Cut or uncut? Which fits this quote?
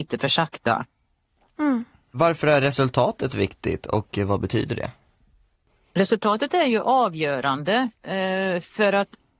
uncut